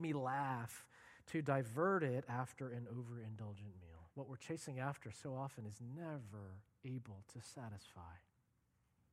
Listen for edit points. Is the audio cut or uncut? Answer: cut